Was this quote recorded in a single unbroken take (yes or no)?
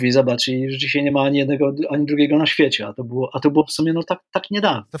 yes